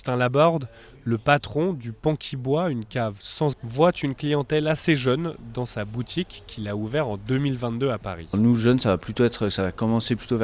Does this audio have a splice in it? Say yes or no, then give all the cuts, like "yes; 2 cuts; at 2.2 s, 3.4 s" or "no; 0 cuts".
yes; 1 cut; at 3.5 s